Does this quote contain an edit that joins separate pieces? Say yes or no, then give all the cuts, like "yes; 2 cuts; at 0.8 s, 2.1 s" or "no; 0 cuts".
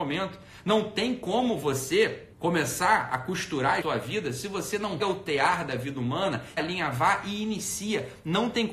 yes; 4 cuts; at 2.3 s, 3.8 s, 5.0 s, 6.6 s